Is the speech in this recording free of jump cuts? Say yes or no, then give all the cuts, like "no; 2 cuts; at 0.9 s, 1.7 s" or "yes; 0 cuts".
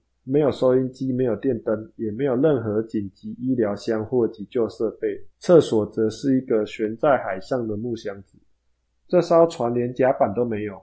no; 1 cut; at 5.3 s